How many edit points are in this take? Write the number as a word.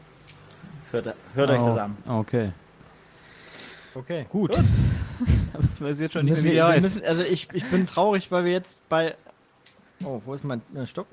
zero